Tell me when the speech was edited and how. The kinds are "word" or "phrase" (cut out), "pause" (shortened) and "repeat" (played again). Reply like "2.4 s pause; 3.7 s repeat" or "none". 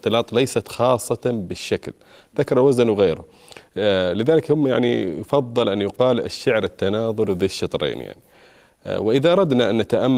none